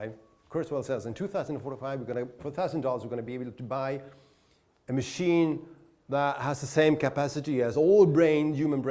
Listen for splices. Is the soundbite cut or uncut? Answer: uncut